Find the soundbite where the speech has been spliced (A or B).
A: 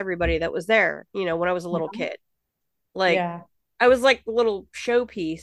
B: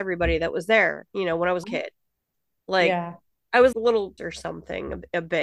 B